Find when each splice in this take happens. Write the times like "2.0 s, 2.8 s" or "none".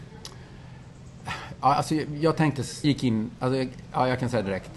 2.8 s